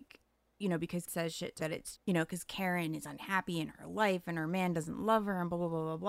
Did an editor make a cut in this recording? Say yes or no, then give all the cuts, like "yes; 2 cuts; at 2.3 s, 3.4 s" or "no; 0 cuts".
yes; 3 cuts; at 1.1 s, 1.6 s, 1.9 s